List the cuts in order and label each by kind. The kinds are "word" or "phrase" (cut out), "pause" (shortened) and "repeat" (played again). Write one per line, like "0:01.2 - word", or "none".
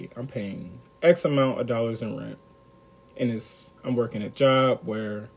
0:03.8 - pause
0:04.3 - word